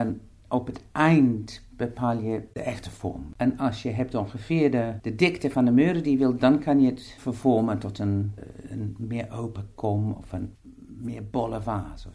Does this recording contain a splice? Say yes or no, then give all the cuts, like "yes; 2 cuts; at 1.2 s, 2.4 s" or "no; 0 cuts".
no; 0 cuts